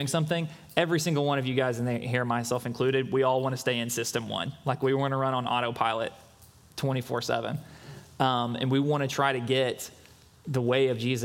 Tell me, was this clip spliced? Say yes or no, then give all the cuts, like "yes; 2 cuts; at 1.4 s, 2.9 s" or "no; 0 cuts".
no; 0 cuts